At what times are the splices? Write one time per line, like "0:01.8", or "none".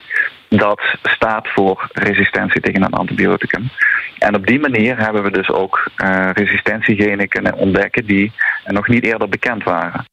0:08.7